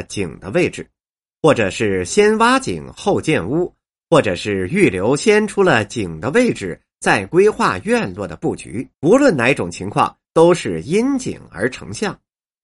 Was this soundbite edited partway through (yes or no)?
yes